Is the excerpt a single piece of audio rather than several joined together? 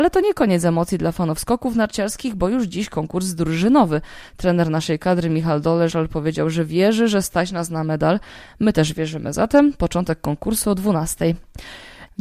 yes; 0 cuts

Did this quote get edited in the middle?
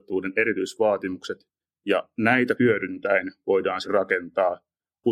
yes; 2 cuts; at 2.6 s, 3.8 s

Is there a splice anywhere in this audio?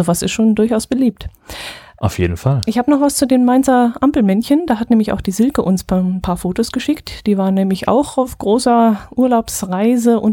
no; 0 cuts

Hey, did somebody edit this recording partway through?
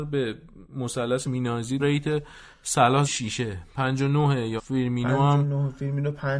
yes; 4 cuts; at 1.2 s, 1.8 s, 3.0 s, 4.6 s

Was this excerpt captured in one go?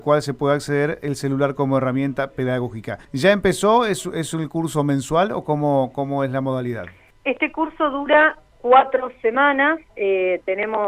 no; 3 cuts; at 3.0 s, 7.1 s, 9.9 s

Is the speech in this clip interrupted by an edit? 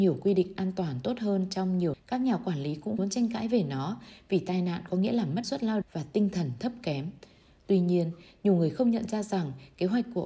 yes; 4 cuts; at 1.9 s, 3.0 s, 5.4 s, 5.8 s

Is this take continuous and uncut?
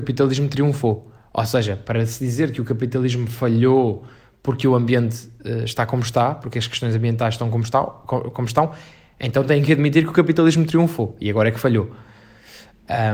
yes; 0 cuts

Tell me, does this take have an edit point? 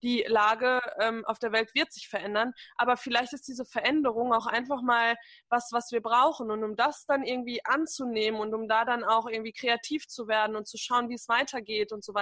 no; 0 cuts

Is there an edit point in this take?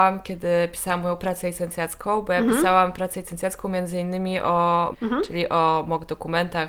yes; 1 cut; at 4.9 s

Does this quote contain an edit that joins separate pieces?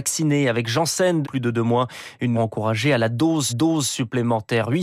yes; 3 cuts; at 1.2 s, 2.3 s, 3.5 s

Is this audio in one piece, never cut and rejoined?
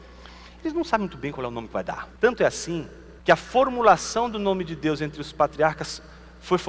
no; 2 cuts; at 2.2 s, 3.2 s

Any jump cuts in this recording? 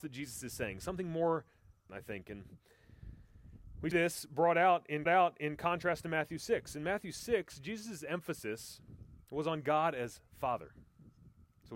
yes; 3 cuts; at 1.9 s, 3.9 s, 5.1 s

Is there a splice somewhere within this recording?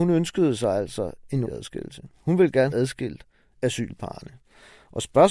yes; 3 cuts; at 1.5 s, 2.7 s, 3.6 s

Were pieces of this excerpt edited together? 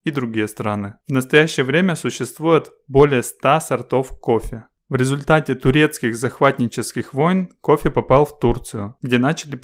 no; 0 cuts

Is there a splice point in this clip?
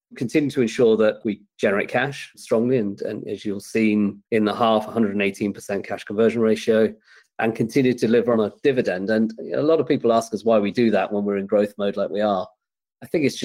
no; 0 cuts

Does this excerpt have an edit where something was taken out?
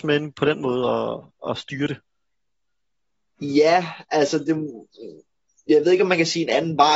no; 0 cuts

